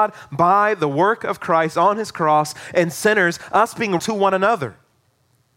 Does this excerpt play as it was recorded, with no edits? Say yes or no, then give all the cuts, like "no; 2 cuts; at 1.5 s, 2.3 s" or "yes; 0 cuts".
no; 1 cut; at 4.0 s